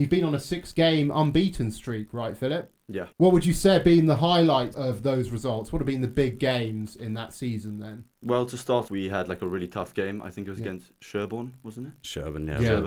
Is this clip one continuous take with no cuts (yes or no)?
no